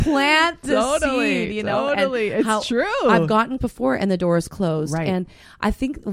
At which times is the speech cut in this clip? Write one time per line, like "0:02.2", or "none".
0:03.6